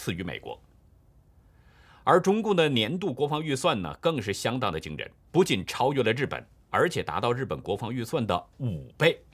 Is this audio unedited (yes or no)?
no